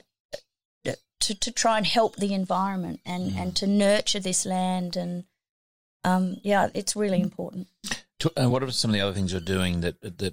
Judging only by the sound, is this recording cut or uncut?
uncut